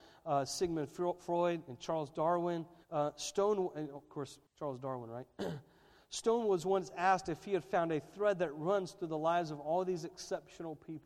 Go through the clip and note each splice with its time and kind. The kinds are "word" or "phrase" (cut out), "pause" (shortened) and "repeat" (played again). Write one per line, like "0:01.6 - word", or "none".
0:02.8 - pause
0:04.5 - pause